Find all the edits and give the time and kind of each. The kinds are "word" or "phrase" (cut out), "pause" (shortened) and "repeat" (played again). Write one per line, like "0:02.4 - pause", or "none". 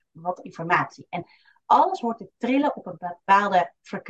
none